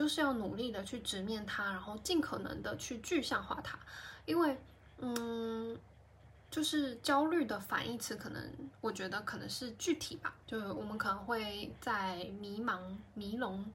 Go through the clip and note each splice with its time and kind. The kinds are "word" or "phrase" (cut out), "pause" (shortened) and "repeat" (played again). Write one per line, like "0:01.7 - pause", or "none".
0:06.4 - pause
0:10.4 - pause